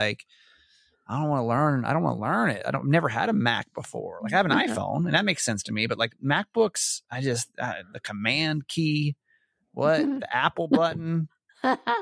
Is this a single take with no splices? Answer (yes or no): yes